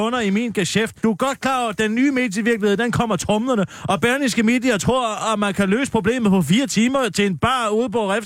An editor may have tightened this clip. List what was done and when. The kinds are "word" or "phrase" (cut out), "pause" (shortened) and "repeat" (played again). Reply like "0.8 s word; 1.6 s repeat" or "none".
1.0 s pause